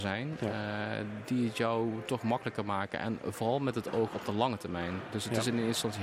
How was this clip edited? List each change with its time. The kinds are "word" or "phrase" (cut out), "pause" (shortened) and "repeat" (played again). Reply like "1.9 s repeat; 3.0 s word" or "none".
none